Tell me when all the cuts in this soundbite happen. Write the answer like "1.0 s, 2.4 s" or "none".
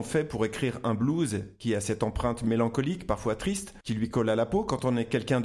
3.8 s